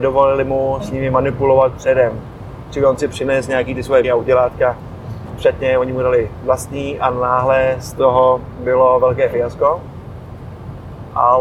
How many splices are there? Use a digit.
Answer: 2